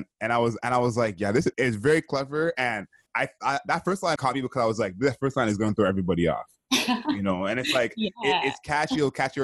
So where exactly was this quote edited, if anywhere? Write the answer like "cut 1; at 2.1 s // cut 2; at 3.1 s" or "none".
cut 1; at 1.5 s // cut 2; at 3.1 s // cut 3; at 4.2 s